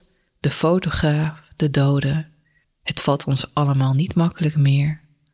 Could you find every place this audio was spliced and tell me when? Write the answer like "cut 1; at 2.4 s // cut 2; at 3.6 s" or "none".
cut 1; at 2.6 s